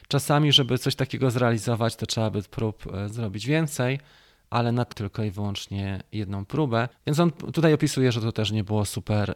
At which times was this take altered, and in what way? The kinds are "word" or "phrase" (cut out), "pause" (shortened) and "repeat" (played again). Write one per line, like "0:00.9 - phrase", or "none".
0:04.9 - word
0:06.9 - pause